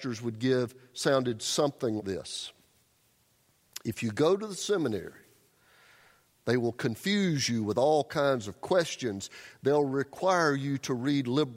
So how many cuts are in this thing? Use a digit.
1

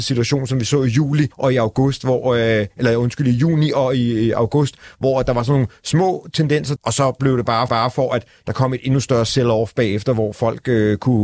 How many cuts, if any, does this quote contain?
3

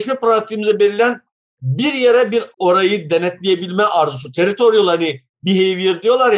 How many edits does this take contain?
1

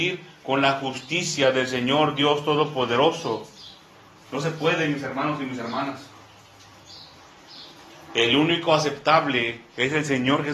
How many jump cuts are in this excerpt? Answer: 0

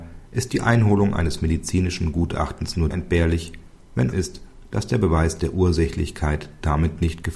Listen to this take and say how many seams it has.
2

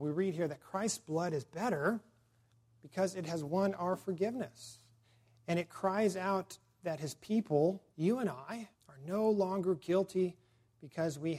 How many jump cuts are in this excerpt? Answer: 4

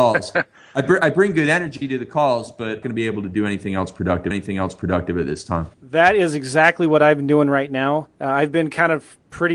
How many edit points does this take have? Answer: 4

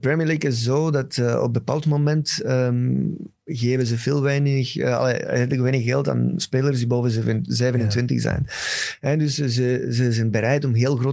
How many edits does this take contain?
0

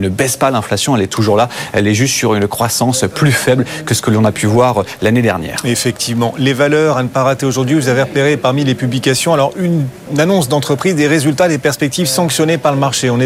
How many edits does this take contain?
0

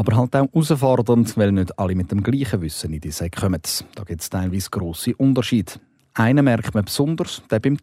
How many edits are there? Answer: 0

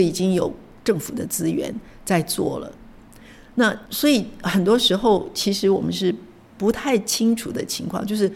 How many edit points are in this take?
1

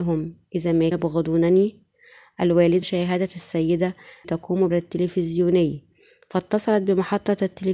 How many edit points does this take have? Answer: 4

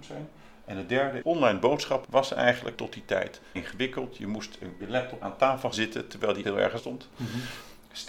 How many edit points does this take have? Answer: 9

